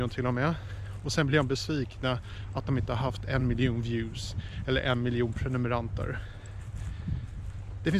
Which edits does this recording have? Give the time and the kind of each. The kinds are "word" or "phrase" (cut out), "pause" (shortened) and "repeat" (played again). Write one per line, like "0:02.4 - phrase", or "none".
none